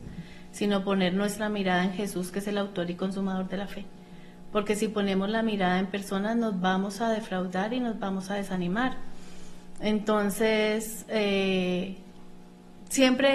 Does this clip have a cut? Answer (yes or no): no